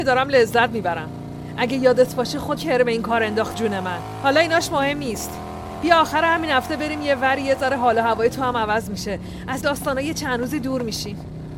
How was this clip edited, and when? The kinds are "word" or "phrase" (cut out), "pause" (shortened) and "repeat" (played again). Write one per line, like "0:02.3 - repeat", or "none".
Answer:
0:02.6 - word
0:03.5 - word
0:09.6 - word